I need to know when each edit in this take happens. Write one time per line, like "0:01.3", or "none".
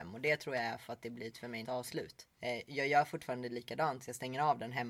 0:01.3
0:01.6
0:02.3